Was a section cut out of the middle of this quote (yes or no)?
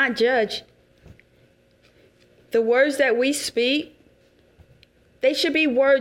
no